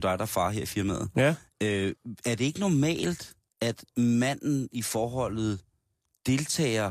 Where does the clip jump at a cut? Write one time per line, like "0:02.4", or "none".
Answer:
0:03.5